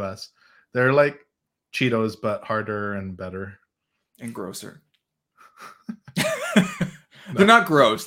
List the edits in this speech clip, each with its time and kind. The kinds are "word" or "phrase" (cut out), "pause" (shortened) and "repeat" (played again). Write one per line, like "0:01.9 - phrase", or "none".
none